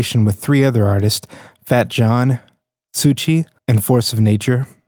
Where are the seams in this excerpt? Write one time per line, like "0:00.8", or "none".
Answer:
0:03.6